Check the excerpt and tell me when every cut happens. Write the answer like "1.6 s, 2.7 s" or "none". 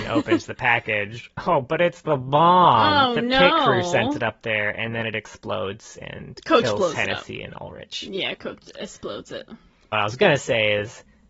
8.4 s, 9.9 s